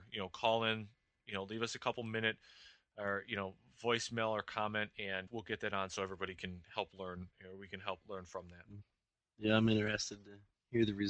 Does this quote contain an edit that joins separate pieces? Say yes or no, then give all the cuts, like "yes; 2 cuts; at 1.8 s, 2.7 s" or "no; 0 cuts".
yes; 3 cuts; at 5.3 s, 7.3 s, 8.0 s